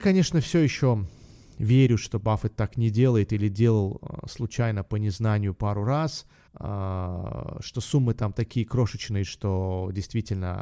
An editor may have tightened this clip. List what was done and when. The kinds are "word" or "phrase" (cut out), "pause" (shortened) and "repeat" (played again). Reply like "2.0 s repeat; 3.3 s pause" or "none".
6.5 s pause